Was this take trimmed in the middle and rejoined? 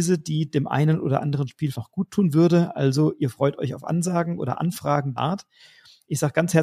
yes; 2 cuts; at 1.7 s, 5.2 s

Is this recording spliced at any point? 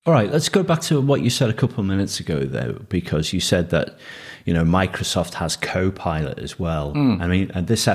no; 0 cuts

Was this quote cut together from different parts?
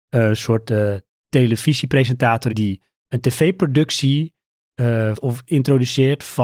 yes; 2 cuts; at 2.5 s, 5.1 s

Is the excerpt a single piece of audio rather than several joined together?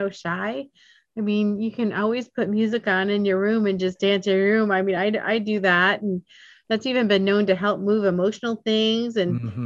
yes; 0 cuts

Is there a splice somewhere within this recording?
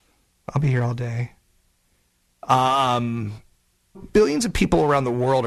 yes; 1 cut; at 3.9 s

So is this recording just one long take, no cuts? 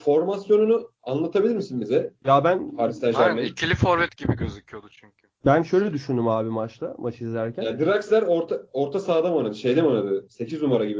yes; 0 cuts

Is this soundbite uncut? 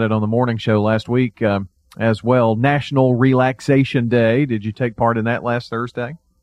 yes; 0 cuts

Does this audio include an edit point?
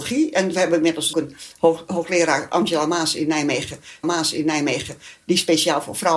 yes; 2 cuts; at 1.1 s, 4.0 s

